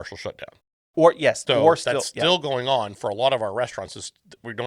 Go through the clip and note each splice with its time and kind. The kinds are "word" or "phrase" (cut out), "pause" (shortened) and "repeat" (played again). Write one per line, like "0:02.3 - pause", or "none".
0:01.5 - word